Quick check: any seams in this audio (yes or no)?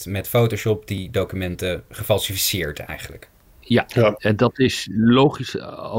no